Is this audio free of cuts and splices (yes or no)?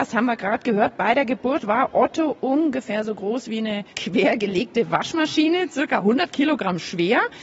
no